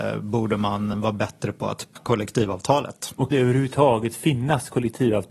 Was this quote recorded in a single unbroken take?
no; 3 cuts; at 0.9 s, 2.0 s, 3.3 s

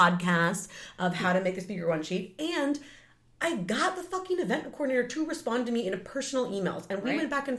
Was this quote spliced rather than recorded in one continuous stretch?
no; 0 cuts

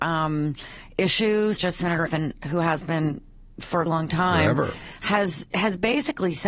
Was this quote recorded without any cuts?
no; 3 cuts; at 1.6 s, 2.1 s, 3.9 s

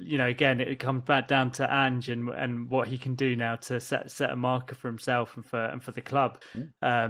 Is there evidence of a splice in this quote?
no; 0 cuts

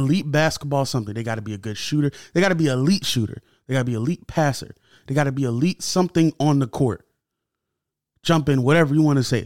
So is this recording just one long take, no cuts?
yes; 0 cuts

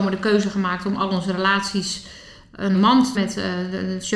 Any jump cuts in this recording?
yes; 2 cuts; at 2.7 s, 3.1 s

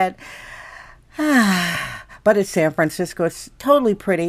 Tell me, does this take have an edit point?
no; 0 cuts

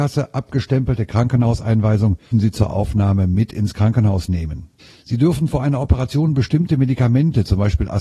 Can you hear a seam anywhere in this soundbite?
yes; 2 cuts; at 2.3 s, 4.8 s

